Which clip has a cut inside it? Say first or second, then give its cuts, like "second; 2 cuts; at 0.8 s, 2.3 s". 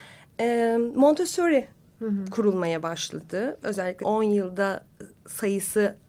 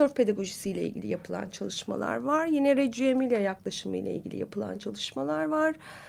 first; 2 cuts; at 1.9 s, 4.0 s